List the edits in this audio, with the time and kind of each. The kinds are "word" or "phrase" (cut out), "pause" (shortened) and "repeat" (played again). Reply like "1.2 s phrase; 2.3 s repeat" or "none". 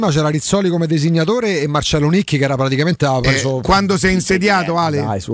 none